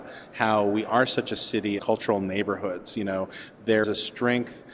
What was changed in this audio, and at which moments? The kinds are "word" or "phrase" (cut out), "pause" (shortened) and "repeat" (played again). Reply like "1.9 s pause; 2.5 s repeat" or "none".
1.8 s word; 3.8 s word